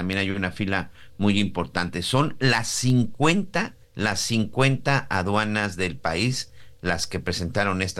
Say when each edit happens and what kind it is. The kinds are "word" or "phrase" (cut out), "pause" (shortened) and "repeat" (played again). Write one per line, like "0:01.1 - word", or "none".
0:03.8 - pause